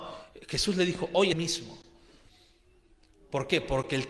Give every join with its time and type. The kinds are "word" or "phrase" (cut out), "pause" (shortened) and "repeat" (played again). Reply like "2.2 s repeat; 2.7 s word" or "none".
1.3 s phrase